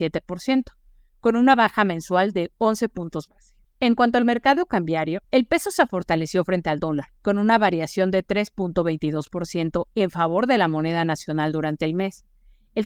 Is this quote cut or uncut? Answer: cut